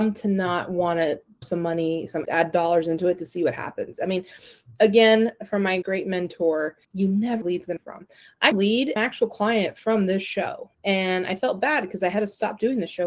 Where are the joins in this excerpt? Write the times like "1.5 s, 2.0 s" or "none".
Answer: 1.4 s, 2.2 s, 5.8 s, 6.8 s, 7.4 s, 7.8 s, 8.5 s, 9.0 s, 10.7 s